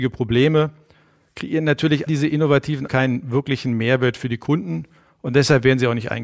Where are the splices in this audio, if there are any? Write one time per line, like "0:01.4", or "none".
0:02.1
0:02.9